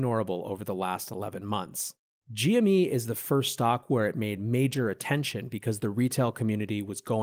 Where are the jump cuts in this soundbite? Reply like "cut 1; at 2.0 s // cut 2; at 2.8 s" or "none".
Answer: none